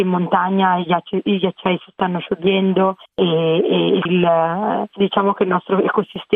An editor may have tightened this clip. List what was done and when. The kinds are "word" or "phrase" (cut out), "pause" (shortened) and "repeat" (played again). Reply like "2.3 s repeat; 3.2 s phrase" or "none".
3.1 s pause; 4.1 s word; 5.0 s word

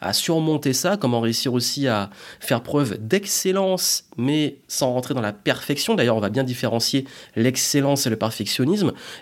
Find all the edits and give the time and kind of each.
none

